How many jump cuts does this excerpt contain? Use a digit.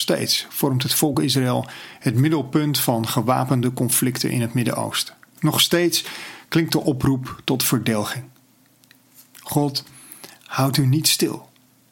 0